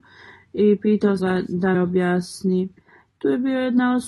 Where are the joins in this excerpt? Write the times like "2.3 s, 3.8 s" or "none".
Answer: 1.2 s, 1.7 s